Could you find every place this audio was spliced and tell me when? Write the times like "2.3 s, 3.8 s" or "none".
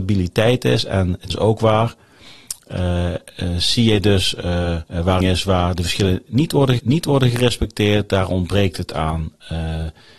1.3 s, 4.9 s, 5.2 s, 6.8 s